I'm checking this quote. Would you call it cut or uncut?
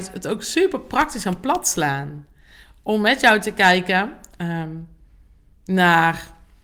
uncut